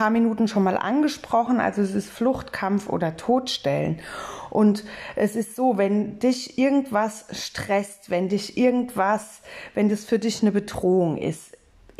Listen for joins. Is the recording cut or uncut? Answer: uncut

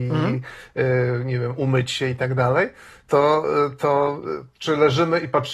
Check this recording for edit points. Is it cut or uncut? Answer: uncut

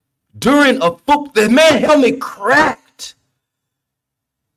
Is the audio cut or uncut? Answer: uncut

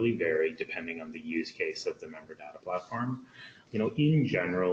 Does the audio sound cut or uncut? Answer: uncut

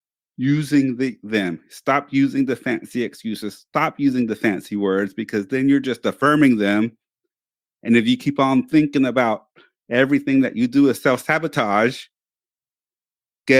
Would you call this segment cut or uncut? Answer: uncut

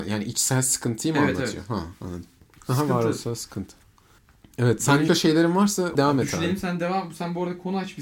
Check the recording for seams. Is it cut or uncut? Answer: cut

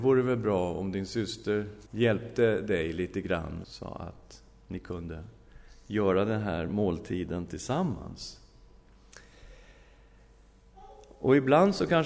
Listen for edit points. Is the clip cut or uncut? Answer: cut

